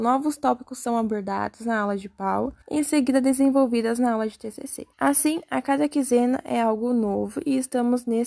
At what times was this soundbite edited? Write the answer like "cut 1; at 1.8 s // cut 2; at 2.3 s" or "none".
cut 1; at 2.6 s // cut 2; at 4.9 s